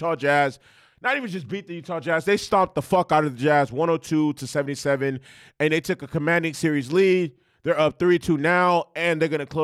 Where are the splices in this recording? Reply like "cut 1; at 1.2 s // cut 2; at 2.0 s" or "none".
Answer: none